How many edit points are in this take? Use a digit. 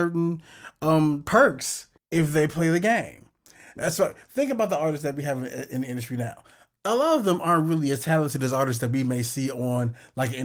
1